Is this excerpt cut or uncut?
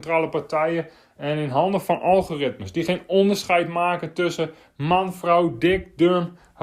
uncut